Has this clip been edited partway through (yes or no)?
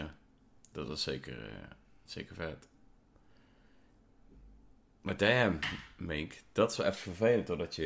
no